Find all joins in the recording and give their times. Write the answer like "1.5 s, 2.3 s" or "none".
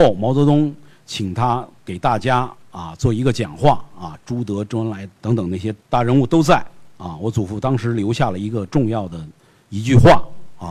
5.2 s, 5.8 s